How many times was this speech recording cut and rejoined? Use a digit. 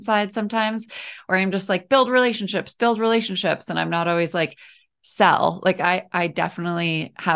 0